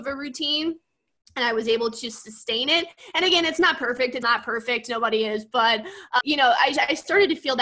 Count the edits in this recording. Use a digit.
2